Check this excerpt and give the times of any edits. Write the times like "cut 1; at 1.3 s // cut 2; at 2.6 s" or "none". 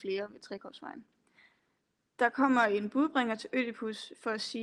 none